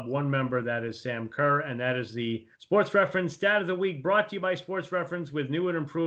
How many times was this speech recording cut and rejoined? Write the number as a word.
one